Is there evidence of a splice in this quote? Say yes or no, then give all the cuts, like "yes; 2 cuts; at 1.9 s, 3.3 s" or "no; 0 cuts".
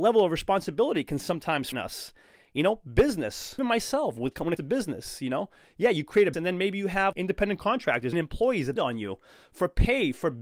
yes; 7 cuts; at 1.7 s, 3.6 s, 4.6 s, 6.3 s, 7.1 s, 8.1 s, 8.8 s